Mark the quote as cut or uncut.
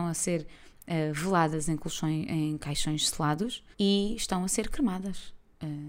cut